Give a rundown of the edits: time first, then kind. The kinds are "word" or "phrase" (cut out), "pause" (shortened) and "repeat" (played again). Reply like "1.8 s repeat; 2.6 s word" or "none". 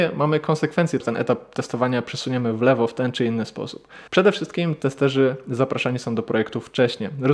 1.0 s word; 4.1 s pause